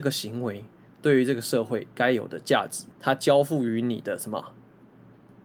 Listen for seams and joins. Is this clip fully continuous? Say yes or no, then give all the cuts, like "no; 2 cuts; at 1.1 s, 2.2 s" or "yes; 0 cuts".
no; 1 cut; at 2.9 s